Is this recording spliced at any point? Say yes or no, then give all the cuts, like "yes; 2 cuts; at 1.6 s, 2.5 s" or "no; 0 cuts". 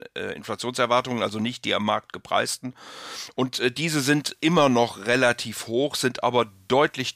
no; 0 cuts